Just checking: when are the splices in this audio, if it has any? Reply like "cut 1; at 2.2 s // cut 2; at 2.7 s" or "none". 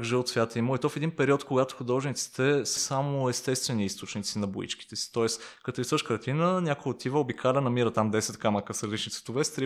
cut 1; at 2.8 s